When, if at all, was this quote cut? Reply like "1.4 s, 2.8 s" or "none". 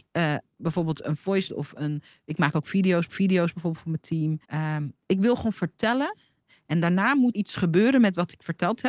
1.5 s, 3.1 s, 4.4 s, 7.3 s

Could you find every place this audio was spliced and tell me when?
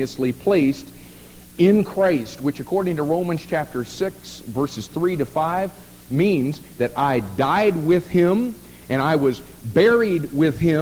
none

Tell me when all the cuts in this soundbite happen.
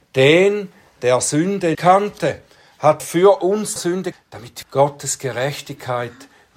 1.7 s, 3.0 s, 3.8 s, 4.1 s, 4.6 s

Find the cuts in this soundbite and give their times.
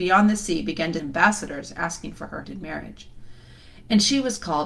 1.0 s, 2.4 s

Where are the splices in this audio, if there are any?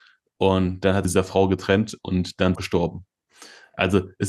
1.0 s, 2.5 s

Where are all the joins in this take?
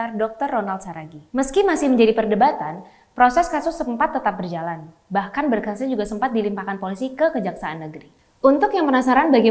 1.3 s

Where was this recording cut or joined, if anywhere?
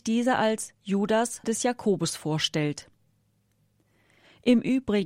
1.4 s

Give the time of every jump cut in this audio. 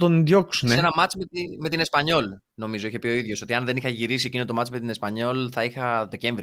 none

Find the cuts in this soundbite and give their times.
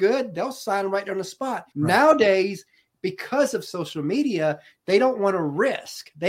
1.7 s

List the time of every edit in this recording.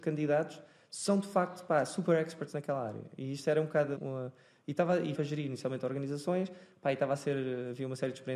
4.0 s, 5.1 s

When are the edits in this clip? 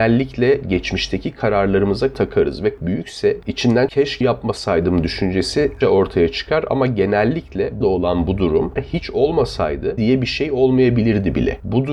2.1 s, 2.8 s, 3.9 s, 4.2 s, 5.8 s, 7.8 s, 8.8 s, 10.0 s

